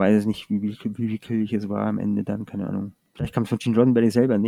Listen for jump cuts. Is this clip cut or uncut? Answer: uncut